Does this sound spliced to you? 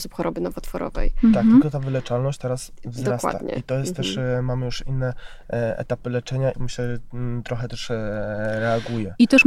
yes; 1 cut; at 6.5 s

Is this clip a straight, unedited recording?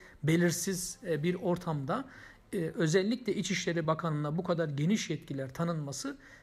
yes; 0 cuts

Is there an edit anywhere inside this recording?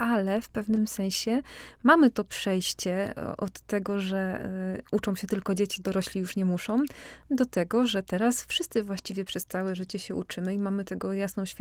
no; 0 cuts

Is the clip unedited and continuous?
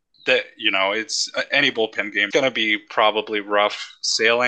no; 1 cut; at 2.3 s

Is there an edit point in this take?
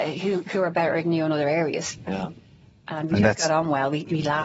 no; 0 cuts

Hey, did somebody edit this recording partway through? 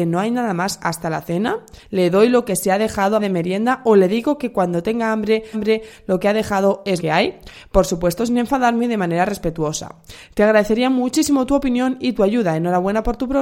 yes; 4 cuts; at 1.8 s, 3.2 s, 5.5 s, 7.0 s

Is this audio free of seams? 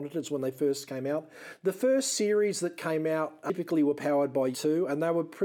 no; 1 cut; at 4.5 s

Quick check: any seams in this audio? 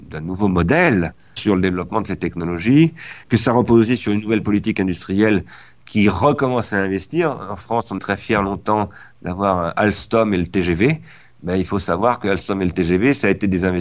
yes; 4 cuts; at 1.4 s, 3.2 s, 4.7 s, 8.0 s

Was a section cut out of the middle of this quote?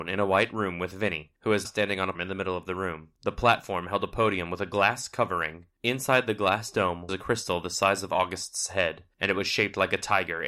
yes; 4 cuts; at 1.6 s, 2.1 s, 3.1 s, 7.1 s

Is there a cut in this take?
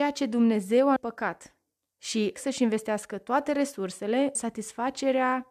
yes; 3 cuts; at 1.0 s, 2.4 s, 4.4 s

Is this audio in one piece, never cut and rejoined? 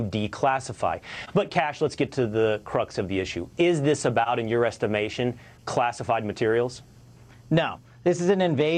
yes; 0 cuts

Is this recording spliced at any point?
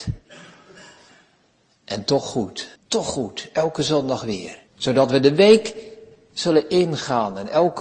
yes; 2 cuts; at 2.8 s, 4.7 s

